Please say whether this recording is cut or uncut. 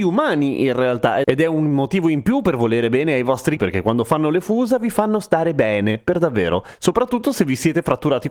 cut